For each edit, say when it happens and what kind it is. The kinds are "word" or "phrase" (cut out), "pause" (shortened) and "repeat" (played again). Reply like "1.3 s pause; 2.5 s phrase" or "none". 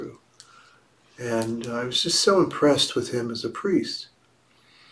none